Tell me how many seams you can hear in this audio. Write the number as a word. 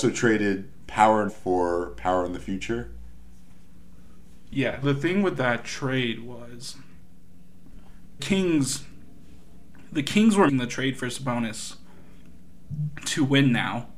four